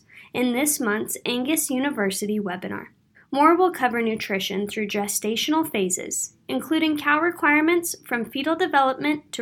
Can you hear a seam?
yes; 1 cut; at 3.1 s

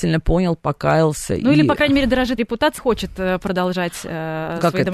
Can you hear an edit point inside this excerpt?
yes; 2 cuts; at 2.4 s, 2.8 s

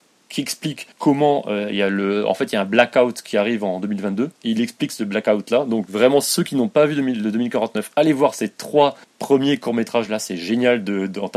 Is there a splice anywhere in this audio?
yes; 3 cuts; at 0.9 s, 4.4 s, 9.0 s

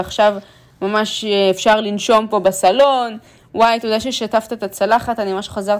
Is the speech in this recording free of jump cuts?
yes; 0 cuts

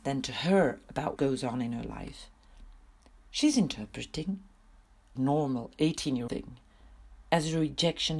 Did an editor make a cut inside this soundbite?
yes; 4 cuts; at 1.2 s, 3.1 s, 5.2 s, 6.3 s

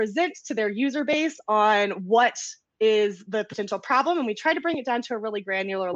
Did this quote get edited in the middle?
no; 0 cuts

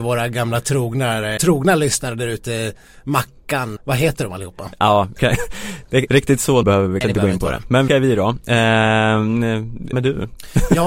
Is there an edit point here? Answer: yes; 8 cuts; at 1.4 s, 3.8 s, 5.2 s, 6.1 s, 6.6 s, 7.0 s, 7.9 s, 9.9 s

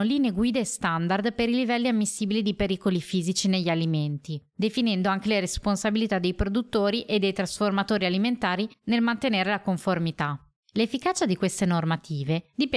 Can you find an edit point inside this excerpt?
no; 0 cuts

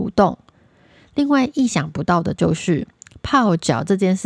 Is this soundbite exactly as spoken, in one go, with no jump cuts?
yes; 0 cuts

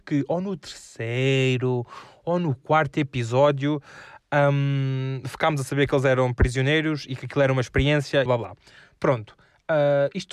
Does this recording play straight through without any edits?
no; 1 cut; at 8.3 s

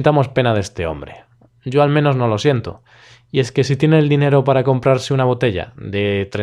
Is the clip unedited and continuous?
yes; 0 cuts

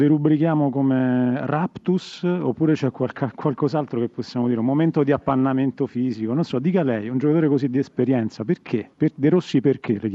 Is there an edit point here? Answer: yes; 1 cut; at 8.9 s

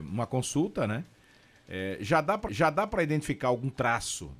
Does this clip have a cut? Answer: yes; 1 cut; at 2.5 s

